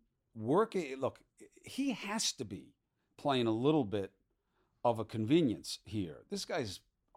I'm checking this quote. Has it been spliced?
no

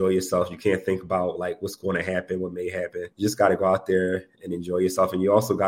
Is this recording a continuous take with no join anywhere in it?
no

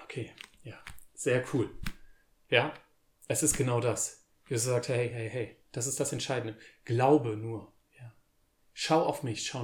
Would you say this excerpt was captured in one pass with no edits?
yes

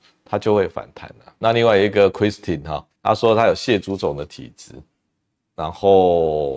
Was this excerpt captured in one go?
no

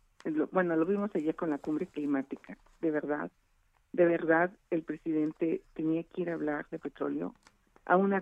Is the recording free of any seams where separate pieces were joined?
yes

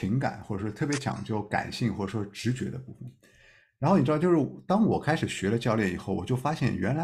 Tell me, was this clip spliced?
no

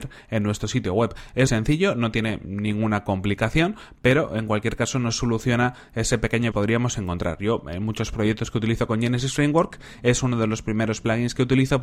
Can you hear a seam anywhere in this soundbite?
yes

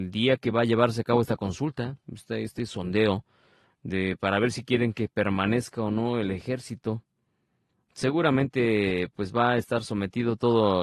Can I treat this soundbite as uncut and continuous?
yes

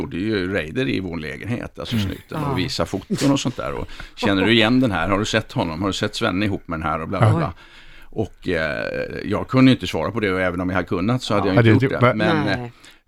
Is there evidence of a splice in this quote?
no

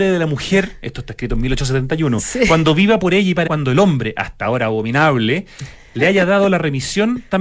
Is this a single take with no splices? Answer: no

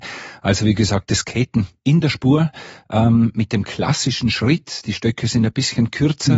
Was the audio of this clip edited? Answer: no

